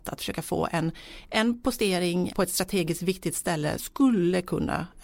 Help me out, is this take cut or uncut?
cut